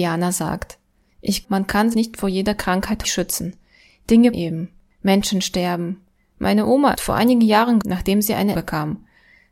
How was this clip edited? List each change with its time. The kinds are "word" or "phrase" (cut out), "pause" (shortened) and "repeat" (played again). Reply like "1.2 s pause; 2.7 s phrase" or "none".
1.4 s word; 1.9 s word; 3.0 s word; 4.3 s word; 6.9 s word; 7.8 s word; 8.5 s word